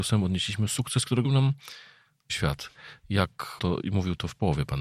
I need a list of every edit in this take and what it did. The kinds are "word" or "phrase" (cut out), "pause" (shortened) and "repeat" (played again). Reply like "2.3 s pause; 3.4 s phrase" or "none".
1.2 s word; 2.3 s word; 3.6 s word

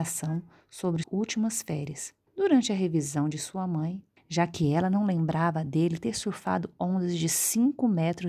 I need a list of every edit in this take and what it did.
1.0 s word; 2.3 s pause; 4.2 s phrase

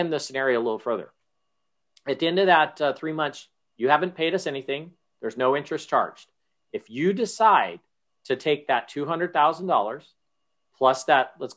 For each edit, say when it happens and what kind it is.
none

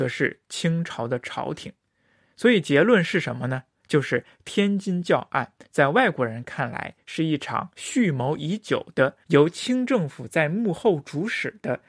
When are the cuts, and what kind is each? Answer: 9.2 s pause

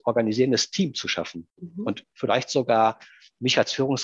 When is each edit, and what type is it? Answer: 2.0 s phrase

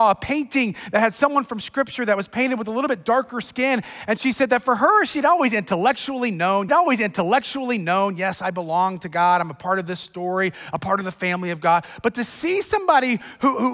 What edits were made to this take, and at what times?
6.7 s repeat

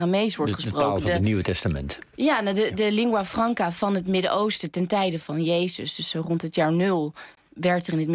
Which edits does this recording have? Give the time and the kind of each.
none

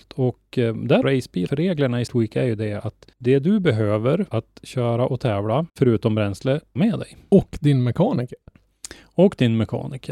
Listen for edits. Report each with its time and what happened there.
1.0 s phrase; 1.5 s word; 2.1 s word; 3.1 s pause; 4.3 s word; 5.7 s pause; 6.8 s phrase

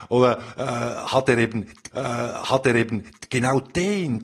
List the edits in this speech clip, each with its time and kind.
1.9 s repeat

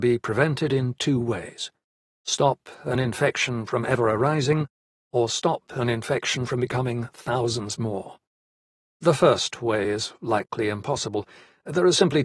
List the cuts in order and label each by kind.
none

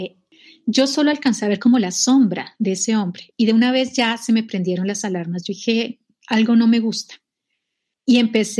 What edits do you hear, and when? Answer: none

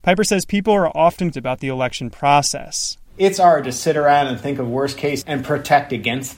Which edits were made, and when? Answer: 1.3 s word; 3.6 s word; 5.2 s word

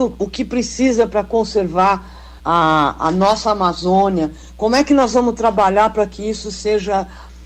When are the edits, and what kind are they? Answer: 2.4 s pause

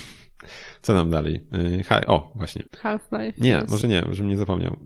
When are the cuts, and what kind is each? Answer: 2.0 s word; 2.7 s pause; 3.8 s word

